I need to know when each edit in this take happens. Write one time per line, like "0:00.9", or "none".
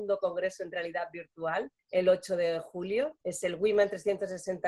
0:01.8
0:03.2